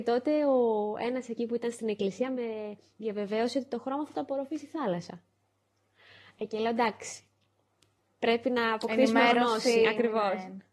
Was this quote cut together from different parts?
no; 0 cuts

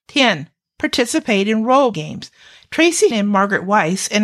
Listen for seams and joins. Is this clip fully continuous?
no; 2 cuts; at 1.9 s, 3.1 s

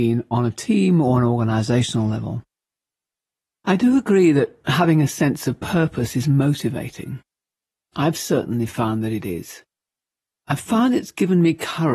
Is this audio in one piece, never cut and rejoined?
yes; 0 cuts

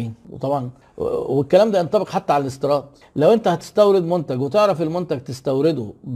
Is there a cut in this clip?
no; 0 cuts

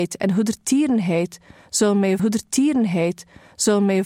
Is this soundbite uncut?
no; 1 cut; at 2.2 s

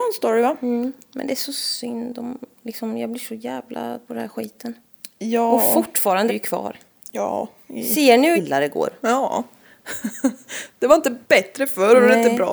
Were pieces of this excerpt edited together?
yes; 4 cuts; at 4.0 s, 6.3 s, 8.3 s, 11.2 s

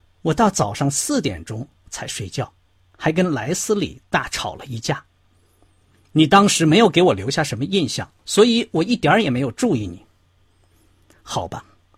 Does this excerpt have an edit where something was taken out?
yes; 1 cut; at 8.2 s

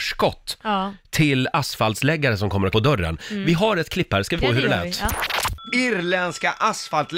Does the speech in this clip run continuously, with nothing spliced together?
no; 2 cuts; at 2.7 s, 4.4 s

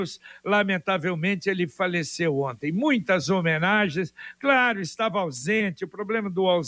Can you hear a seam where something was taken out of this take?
no; 0 cuts

